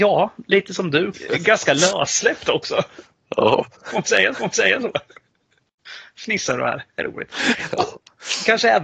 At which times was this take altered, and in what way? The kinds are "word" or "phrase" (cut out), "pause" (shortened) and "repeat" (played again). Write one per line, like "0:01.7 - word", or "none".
0:01.1 - phrase
0:03.7 - pause
0:04.3 - repeat
0:06.9 - pause

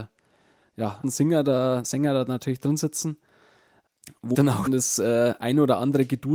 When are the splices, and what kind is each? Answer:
0:01.0 - word
0:01.8 - word
0:04.3 - word
0:04.7 - word

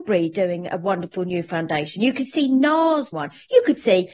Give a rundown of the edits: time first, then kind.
0:03.1 - word

